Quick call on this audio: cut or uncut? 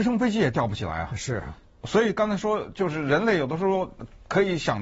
uncut